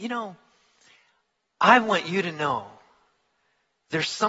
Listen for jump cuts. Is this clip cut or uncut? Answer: uncut